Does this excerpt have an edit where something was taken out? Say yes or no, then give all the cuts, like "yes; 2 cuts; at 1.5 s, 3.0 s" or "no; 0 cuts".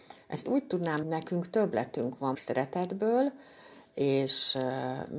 yes; 2 cuts; at 1.0 s, 2.3 s